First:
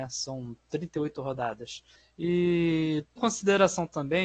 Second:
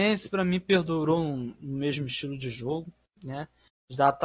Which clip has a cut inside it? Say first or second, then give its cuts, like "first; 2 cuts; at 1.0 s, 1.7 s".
first; 1 cut; at 3.2 s